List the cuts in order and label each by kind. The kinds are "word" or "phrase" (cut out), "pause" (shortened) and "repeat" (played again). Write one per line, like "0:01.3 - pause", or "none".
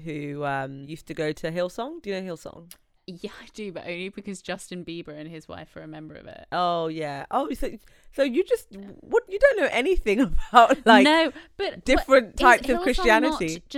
none